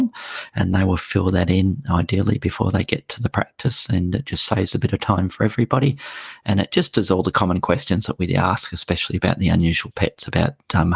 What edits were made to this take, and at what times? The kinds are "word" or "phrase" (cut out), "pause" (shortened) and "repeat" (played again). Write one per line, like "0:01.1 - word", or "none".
none